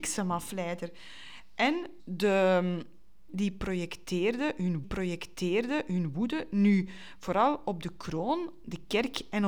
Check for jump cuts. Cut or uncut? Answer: cut